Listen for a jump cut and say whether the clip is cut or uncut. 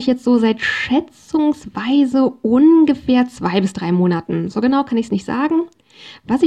uncut